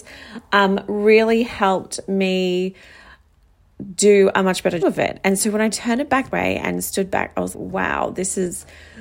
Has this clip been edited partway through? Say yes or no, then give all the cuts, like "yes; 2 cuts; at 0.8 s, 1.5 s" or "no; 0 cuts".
yes; 3 cuts; at 4.8 s, 6.3 s, 7.5 s